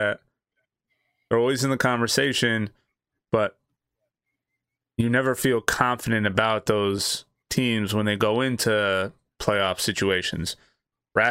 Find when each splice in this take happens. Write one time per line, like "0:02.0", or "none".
none